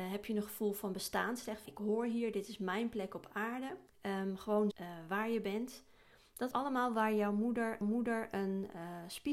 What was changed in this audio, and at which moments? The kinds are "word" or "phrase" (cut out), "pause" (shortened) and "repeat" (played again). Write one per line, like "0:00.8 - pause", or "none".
0:01.7 - word
0:03.9 - pause
0:04.7 - phrase
0:06.5 - word
0:07.8 - repeat